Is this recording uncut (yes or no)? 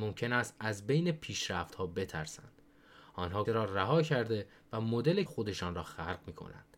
no